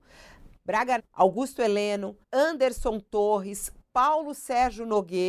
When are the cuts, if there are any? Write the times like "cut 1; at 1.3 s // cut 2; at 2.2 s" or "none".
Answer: cut 1; at 1.0 s // cut 2; at 2.2 s

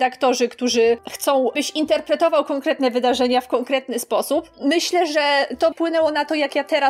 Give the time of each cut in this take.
cut 1; at 1.5 s // cut 2; at 5.7 s

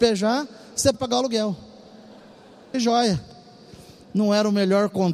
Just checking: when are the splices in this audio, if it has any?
cut 1; at 0.9 s // cut 2; at 2.7 s

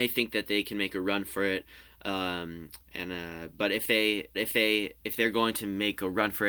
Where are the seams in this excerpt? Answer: cut 1; at 2.8 s // cut 2; at 4.3 s

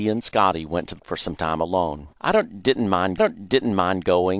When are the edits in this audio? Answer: cut 1; at 1.0 s // cut 2; at 2.1 s // cut 3; at 3.2 s

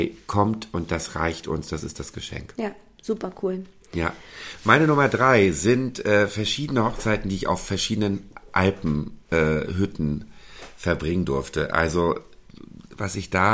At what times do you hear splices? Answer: none

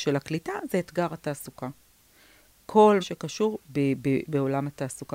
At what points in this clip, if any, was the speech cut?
cut 1; at 3.0 s // cut 2; at 3.6 s // cut 3; at 4.2 s

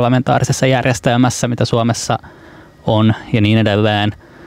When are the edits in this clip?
none

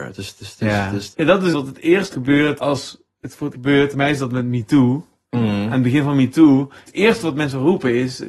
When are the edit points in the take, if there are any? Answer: cut 1; at 1.1 s // cut 2; at 1.5 s // cut 3; at 2.1 s // cut 4; at 2.6 s // cut 5; at 3.5 s // cut 6; at 3.9 s // cut 7; at 6.9 s

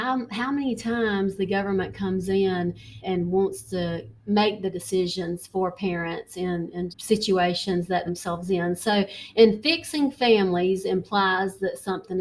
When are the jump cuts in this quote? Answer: cut 1; at 3.0 s // cut 2; at 4.2 s // cut 3; at 6.9 s // cut 4; at 8.1 s

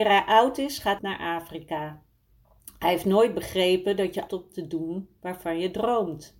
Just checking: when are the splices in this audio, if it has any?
cut 1; at 1.0 s // cut 2; at 4.3 s

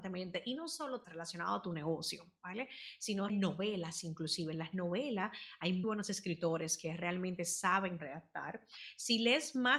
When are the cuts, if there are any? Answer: cut 1; at 1.0 s // cut 2; at 3.3 s // cut 3; at 5.8 s // cut 4; at 8.0 s

